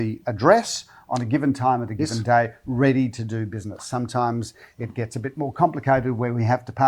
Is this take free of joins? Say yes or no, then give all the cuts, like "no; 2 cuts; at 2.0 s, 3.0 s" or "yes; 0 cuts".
yes; 0 cuts